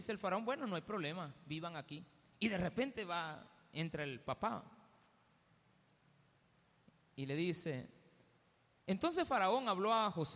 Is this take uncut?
yes; 0 cuts

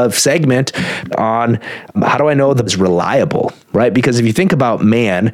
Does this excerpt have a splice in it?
yes; 4 cuts; at 1.1 s, 1.9 s, 2.7 s, 3.6 s

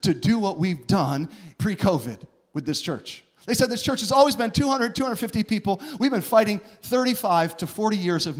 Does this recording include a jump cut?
no; 0 cuts

